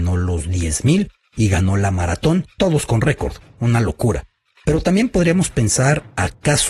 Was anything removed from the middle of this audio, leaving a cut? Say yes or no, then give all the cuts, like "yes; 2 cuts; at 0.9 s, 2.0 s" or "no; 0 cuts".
no; 0 cuts